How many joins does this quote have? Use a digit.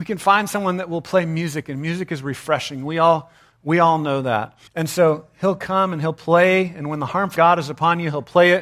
2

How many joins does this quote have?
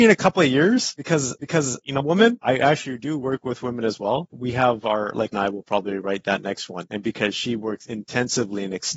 4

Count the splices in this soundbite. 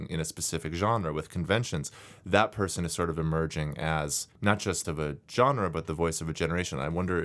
2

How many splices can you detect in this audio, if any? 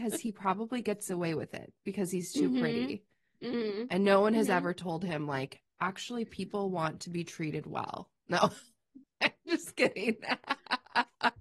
0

